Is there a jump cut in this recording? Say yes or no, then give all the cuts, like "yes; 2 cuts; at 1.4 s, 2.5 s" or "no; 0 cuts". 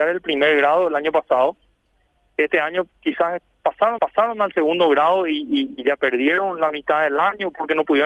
yes; 2 cuts; at 2.9 s, 4.0 s